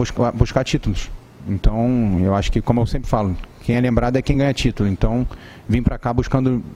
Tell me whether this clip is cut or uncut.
uncut